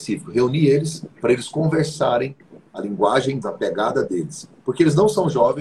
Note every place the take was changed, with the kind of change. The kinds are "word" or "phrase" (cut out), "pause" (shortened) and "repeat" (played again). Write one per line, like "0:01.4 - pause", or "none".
0:01.1 - pause
0:03.4 - word